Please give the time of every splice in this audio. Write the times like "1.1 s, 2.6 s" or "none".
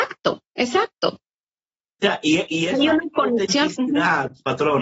none